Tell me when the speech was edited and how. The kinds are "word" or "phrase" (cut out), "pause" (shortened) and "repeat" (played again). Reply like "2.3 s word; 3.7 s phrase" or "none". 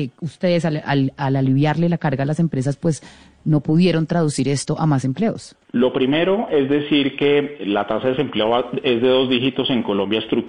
5.6 s pause